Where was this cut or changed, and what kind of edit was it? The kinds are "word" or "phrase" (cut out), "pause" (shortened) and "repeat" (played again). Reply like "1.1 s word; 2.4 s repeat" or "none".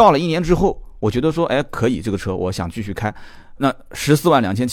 3.6 s word